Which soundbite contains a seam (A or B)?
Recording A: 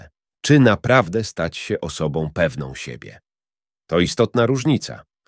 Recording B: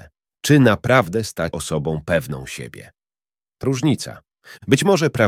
B